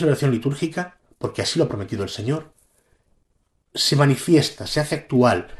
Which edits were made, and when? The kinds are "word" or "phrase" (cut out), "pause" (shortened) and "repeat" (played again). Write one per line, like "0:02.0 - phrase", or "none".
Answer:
none